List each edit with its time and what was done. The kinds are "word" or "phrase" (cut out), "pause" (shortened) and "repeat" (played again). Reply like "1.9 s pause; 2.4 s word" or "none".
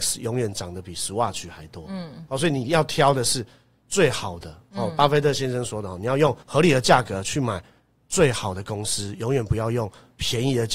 6.4 s pause